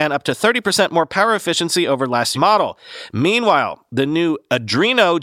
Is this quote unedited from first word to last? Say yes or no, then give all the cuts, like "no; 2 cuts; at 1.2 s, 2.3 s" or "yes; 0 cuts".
no; 1 cut; at 2.3 s